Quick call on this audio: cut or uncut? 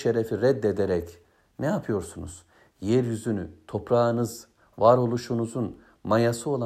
uncut